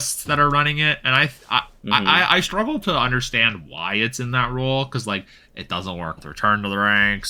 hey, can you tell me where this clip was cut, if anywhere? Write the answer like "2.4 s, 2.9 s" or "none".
6.2 s